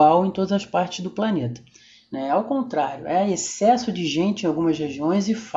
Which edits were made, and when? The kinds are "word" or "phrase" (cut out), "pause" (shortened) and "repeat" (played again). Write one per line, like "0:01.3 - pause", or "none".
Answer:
none